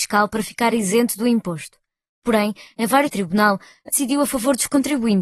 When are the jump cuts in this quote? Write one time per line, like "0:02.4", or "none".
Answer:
0:03.1
0:03.9